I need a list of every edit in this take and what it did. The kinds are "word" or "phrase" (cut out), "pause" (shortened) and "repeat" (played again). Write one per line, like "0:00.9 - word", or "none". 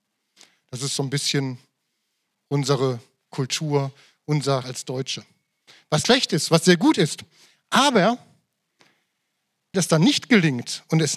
0:04.6 - word
0:06.0 - word
0:09.7 - word